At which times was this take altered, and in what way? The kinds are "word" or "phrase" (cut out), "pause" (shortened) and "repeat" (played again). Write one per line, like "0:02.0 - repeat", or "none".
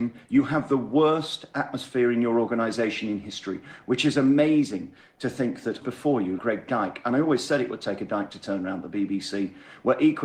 0:05.8 - word
0:06.4 - word